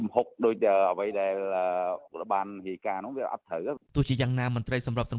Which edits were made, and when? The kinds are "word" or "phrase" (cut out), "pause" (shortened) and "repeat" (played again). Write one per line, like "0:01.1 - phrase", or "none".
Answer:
0:03.9 - pause